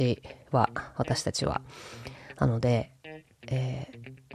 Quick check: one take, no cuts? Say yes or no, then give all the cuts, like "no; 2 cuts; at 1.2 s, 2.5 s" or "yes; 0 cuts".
yes; 0 cuts